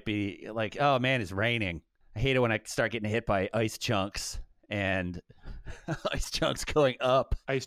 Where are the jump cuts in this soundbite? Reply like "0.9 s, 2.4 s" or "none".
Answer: 2.0 s